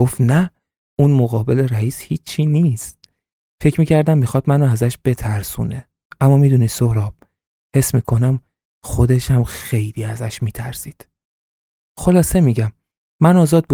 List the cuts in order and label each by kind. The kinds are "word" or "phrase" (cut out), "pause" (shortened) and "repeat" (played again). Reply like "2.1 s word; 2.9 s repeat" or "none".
none